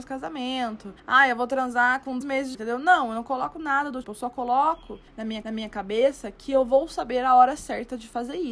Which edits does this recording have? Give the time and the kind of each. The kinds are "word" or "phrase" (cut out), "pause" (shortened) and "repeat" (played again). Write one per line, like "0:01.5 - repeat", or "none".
0:01.0 - pause
0:02.2 - word
0:02.5 - word
0:04.0 - word
0:05.1 - pause
0:05.4 - repeat

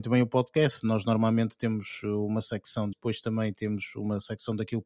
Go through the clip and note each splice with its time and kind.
0:02.9 - word

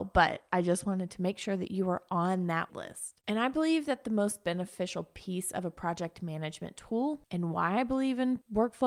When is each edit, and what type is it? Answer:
0:02.7 - word

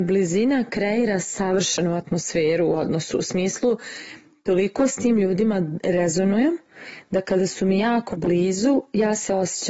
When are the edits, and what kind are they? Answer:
none

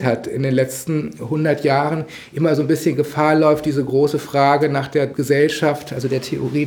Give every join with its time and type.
none

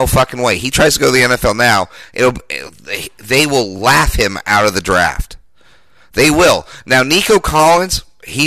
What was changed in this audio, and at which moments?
none

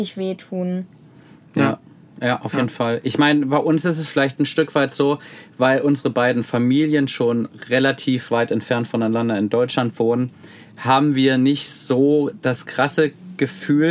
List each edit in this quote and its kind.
none

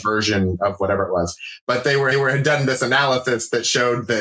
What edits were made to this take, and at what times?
0:02.1 - repeat

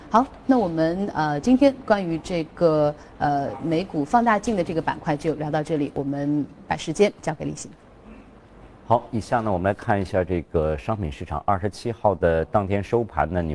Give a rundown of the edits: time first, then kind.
0:08.8 - pause

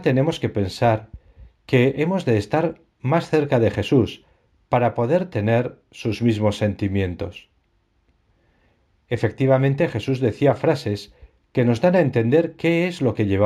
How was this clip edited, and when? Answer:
none

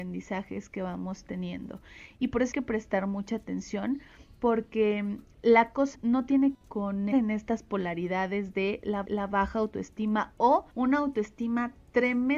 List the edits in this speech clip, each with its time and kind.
0:02.5 - word
0:05.9 - word
0:07.1 - word
0:09.0 - repeat
0:10.7 - pause

